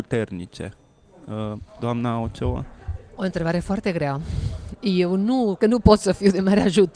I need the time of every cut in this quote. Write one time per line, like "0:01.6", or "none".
0:03.1
0:05.6